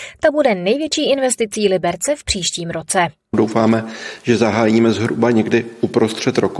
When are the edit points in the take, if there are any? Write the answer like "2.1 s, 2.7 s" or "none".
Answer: none